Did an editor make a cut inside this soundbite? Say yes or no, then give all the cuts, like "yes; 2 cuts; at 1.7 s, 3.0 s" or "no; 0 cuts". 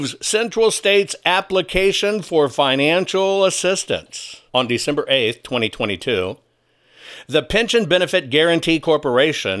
yes; 1 cut; at 4.5 s